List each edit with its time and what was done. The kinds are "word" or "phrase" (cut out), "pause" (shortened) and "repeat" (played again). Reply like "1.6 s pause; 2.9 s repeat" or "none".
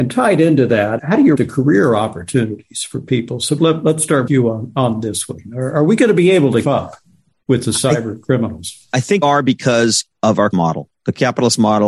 1.0 s word; 1.3 s word; 3.6 s word; 4.3 s word; 6.6 s word; 9.2 s word; 10.5 s word

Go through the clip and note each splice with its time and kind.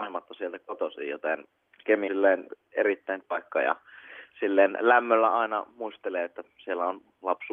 2.1 s word; 3.2 s word

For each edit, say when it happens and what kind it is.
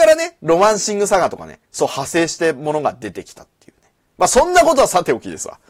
1.6 s pause; 4.0 s pause

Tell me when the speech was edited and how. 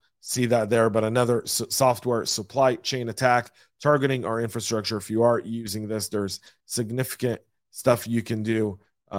none

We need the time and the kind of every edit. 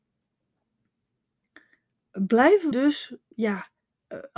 2.7 s word; 3.3 s word

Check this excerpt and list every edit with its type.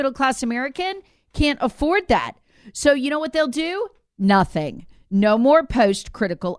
none

